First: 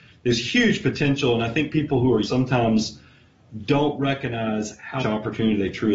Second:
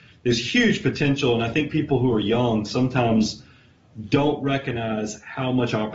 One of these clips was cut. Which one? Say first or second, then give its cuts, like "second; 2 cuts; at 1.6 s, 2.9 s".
first; 2 cuts; at 2.2 s, 5.0 s